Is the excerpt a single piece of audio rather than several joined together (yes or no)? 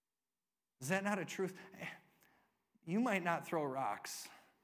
yes